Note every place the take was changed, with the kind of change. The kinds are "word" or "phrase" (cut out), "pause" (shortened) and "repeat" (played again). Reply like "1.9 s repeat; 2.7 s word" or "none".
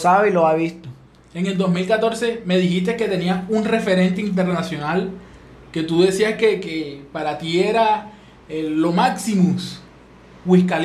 none